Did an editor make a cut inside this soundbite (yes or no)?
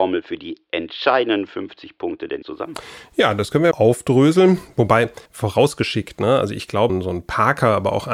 yes